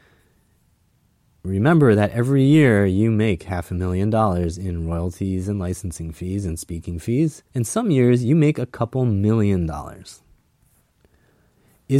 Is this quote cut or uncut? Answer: cut